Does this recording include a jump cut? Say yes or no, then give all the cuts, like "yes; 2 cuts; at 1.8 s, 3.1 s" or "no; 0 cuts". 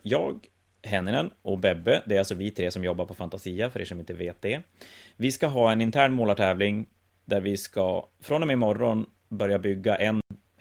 no; 0 cuts